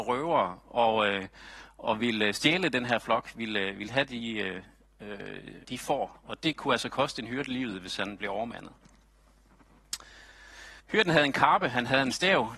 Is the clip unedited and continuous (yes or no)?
no